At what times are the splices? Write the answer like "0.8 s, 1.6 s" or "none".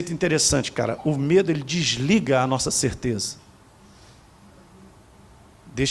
none

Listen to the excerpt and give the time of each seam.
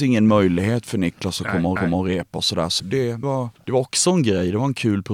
1.8 s, 2.8 s, 3.2 s

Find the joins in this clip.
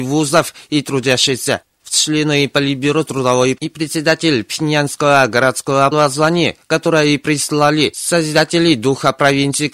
1.8 s, 3.0 s, 3.6 s, 5.9 s

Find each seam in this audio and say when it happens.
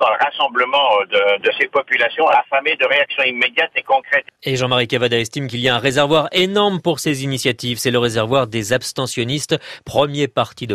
1.4 s, 4.4 s

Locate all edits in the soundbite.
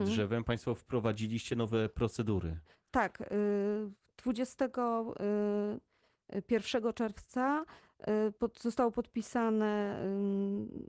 none

